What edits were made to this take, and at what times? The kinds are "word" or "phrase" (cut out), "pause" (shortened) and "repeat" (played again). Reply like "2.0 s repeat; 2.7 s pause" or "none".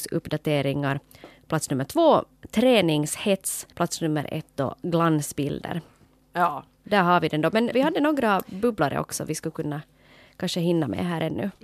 3.7 s pause; 7.7 s word